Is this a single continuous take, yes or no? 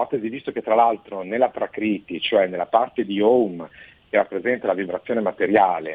yes